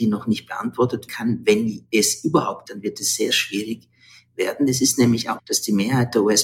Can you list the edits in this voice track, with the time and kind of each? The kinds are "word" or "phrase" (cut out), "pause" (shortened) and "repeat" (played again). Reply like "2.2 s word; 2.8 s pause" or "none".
1.1 s word; 2.6 s word; 3.3 s word; 5.4 s word